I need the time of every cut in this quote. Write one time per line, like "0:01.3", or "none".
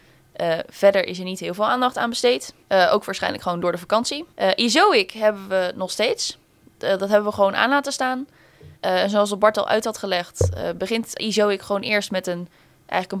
0:08.7